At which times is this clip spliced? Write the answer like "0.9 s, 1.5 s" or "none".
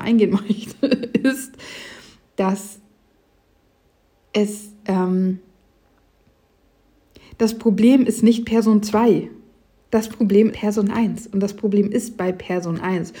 4.8 s, 10.5 s